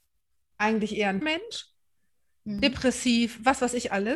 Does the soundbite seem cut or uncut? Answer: cut